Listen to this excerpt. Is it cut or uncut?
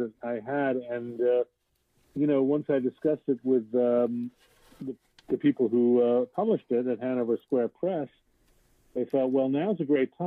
uncut